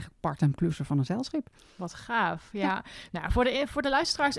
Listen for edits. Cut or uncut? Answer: uncut